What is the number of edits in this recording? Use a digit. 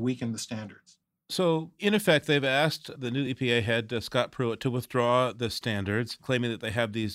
0